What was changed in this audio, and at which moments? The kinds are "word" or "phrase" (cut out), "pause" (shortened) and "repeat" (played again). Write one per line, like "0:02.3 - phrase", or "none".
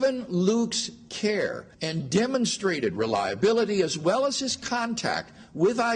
0:01.7 - pause

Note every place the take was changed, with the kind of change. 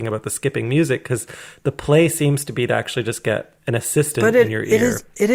0:03.6 - pause

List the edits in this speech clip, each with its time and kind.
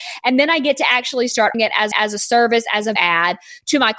0:01.5 - word
0:01.9 - repeat
0:03.0 - word

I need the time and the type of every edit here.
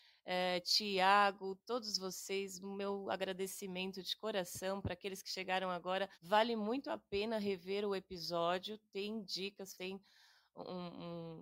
0:06.1 - pause
0:09.7 - word

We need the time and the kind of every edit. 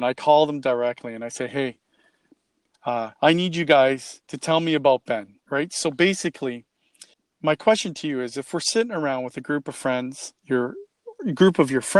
0:03.2 - pause
0:04.2 - pause
0:05.4 - pause
0:07.1 - pause
0:10.4 - pause

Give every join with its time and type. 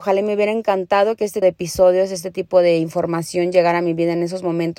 0:01.4 - word

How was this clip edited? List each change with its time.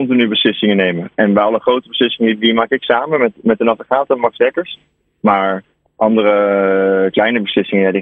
none

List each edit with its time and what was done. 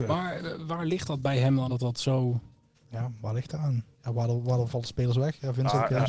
0:01.7 - word
0:03.9 - pause

